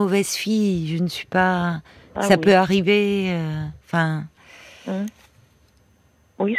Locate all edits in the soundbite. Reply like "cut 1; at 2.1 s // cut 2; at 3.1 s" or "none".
none